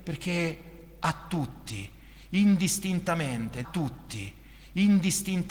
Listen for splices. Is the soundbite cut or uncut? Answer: cut